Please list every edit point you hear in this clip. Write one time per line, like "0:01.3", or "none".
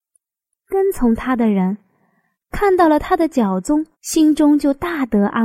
0:03.9

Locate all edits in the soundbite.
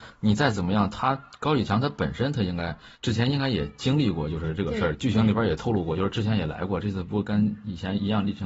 0:02.9

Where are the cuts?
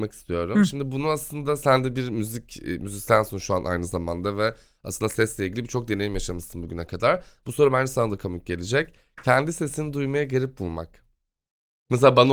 none

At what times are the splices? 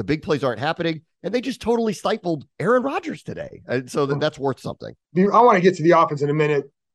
0:05.0

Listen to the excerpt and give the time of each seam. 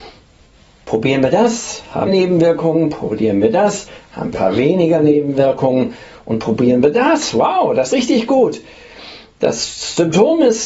0:02.1
0:04.3
0:07.9

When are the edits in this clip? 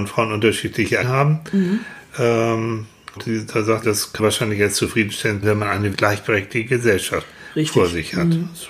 0:01.0
0:03.2
0:03.8
0:04.2
0:05.4
0:05.9

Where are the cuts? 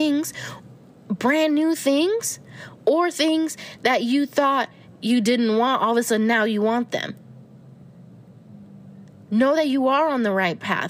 none

